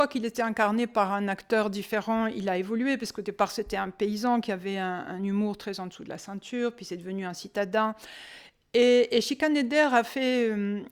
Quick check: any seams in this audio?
no; 0 cuts

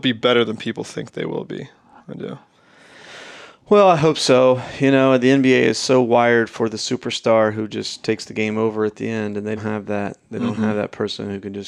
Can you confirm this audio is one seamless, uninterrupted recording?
no; 1 cut; at 9.6 s

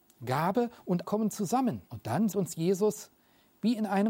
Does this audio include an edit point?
yes; 3 cuts; at 1.0 s, 1.9 s, 2.3 s

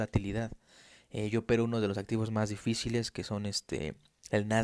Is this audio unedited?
yes; 0 cuts

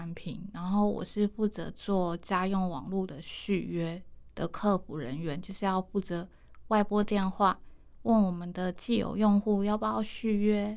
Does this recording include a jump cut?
no; 0 cuts

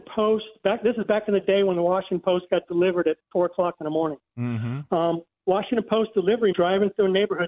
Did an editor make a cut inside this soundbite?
yes; 1 cut; at 6.5 s

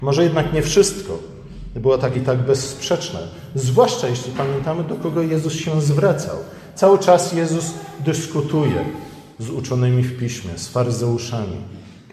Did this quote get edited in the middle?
yes; 1 cut; at 2.1 s

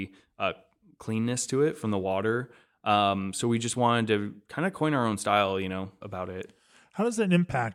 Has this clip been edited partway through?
yes; 1 cut; at 6.0 s

